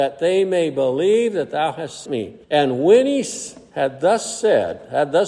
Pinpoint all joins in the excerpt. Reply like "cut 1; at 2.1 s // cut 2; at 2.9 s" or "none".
cut 1; at 2.1 s // cut 2; at 2.4 s